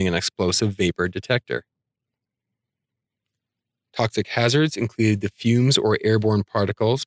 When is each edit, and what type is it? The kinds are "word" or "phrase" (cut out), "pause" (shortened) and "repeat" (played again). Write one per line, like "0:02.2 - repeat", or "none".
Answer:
none